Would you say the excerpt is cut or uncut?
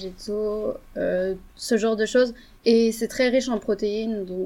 uncut